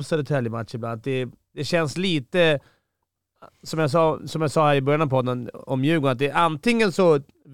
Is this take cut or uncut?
uncut